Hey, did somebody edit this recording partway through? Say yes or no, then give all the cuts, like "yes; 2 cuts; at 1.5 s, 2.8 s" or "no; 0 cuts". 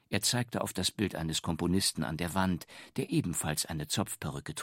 no; 0 cuts